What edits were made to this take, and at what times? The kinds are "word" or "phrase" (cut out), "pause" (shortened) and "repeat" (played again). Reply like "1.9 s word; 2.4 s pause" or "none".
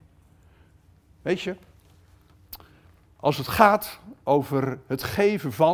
none